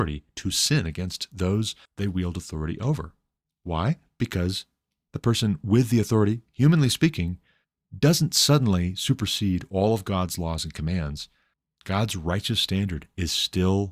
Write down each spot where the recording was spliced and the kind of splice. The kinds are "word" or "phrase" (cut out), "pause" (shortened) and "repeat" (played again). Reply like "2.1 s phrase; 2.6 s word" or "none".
1.8 s pause